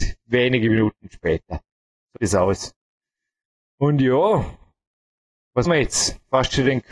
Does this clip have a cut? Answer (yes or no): yes